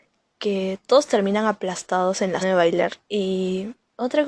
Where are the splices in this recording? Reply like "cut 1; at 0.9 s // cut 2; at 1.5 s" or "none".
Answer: cut 1; at 2.4 s // cut 2; at 3.0 s